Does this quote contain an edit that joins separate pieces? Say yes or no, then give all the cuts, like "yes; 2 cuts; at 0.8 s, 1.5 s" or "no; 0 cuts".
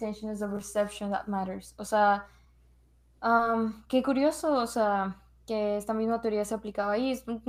no; 0 cuts